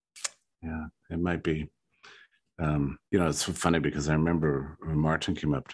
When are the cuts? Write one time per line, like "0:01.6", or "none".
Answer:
0:03.1